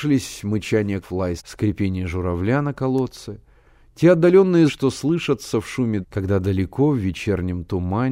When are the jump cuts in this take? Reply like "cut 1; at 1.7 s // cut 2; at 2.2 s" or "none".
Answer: cut 1; at 1.0 s // cut 2; at 1.4 s // cut 3; at 4.7 s // cut 4; at 6.0 s